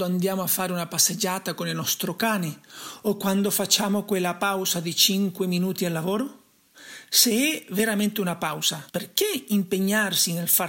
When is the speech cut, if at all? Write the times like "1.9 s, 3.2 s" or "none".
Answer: 8.9 s